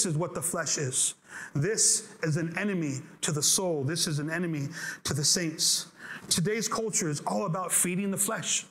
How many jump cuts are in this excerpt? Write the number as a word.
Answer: zero